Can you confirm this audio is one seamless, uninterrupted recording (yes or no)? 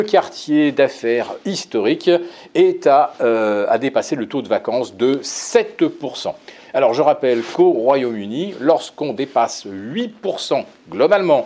yes